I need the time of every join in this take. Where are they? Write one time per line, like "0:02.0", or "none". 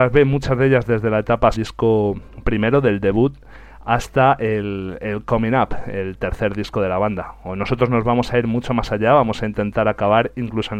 0:01.5